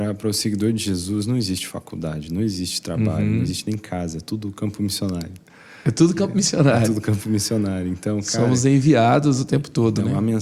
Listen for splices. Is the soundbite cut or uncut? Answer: uncut